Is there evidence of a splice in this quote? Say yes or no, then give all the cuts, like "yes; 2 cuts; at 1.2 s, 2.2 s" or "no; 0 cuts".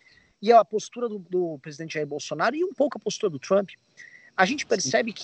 no; 0 cuts